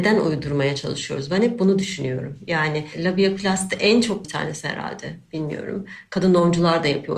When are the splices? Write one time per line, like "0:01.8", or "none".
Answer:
0:04.2